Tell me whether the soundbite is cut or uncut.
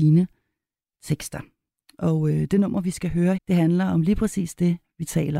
cut